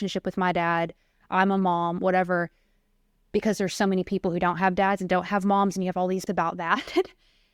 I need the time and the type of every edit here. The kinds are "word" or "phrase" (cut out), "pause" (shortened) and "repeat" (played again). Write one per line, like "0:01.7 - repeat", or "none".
0:06.3 - word